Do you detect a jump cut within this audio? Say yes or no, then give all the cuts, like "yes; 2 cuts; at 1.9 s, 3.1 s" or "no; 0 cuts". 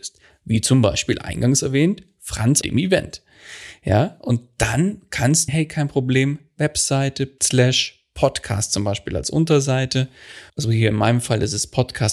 yes; 3 cuts; at 2.6 s, 5.5 s, 10.5 s